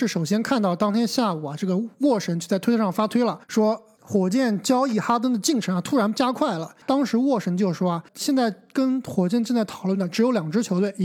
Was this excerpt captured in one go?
no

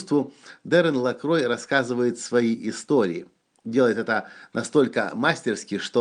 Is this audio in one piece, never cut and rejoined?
yes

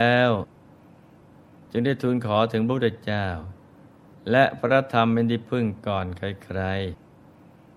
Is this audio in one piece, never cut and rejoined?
yes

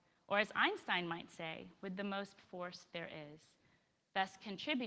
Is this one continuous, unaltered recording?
no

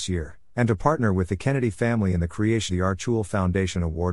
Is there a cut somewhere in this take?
yes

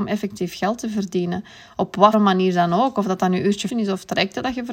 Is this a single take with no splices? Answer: no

